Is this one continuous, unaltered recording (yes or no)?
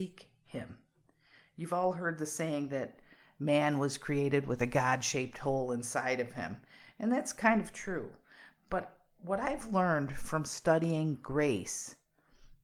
yes